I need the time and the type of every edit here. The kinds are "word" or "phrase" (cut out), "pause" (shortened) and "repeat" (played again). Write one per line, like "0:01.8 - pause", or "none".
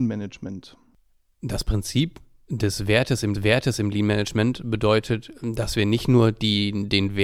0:03.3 - repeat